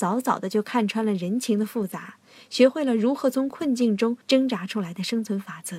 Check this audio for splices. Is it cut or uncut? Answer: cut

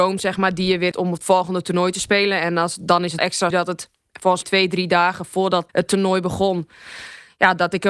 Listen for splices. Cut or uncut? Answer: cut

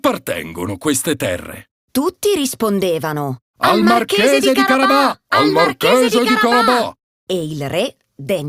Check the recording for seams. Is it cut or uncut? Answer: cut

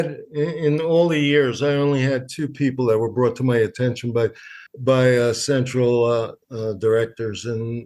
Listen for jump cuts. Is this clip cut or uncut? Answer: cut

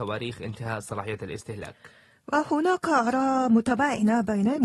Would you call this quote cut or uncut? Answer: uncut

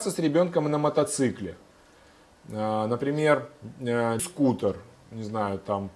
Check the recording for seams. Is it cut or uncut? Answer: cut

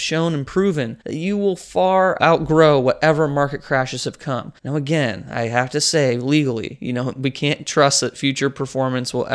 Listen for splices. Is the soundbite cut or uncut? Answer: cut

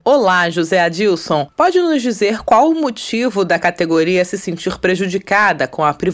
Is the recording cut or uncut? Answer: uncut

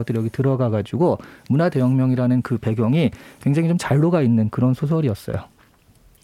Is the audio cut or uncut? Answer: uncut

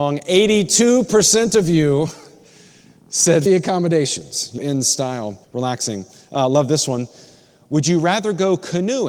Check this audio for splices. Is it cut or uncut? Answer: cut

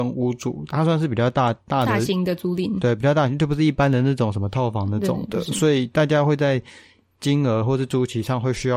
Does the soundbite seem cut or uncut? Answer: uncut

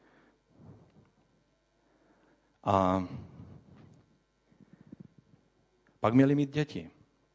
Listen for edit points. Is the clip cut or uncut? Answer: uncut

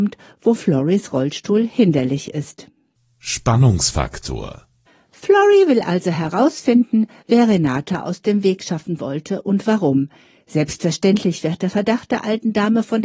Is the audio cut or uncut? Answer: uncut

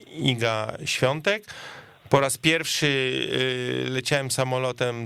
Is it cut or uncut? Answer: uncut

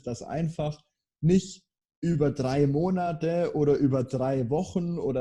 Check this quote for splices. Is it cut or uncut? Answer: uncut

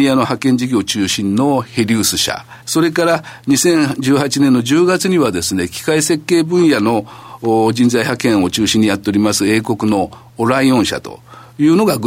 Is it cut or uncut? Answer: cut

